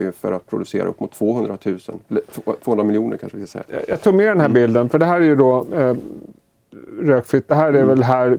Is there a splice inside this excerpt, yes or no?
yes